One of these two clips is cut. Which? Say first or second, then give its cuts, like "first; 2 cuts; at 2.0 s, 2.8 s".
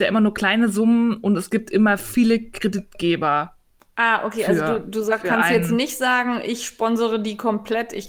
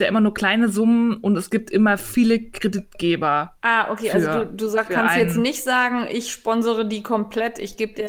second; 1 cut; at 3.6 s